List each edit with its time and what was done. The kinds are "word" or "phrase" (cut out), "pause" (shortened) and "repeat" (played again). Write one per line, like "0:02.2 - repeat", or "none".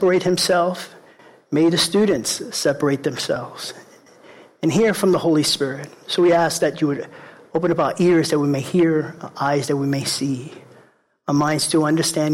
none